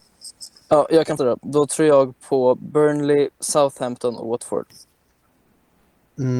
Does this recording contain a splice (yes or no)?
yes